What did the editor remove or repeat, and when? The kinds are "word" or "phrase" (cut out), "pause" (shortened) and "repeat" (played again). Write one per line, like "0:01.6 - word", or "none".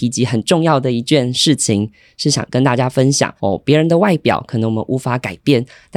0:03.4 - pause